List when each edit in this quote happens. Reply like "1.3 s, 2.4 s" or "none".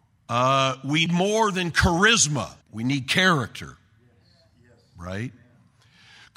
1.1 s, 2.6 s